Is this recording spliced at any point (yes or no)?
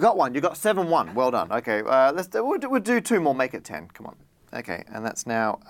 no